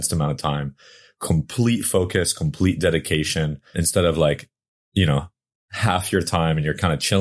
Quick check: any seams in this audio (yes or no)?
yes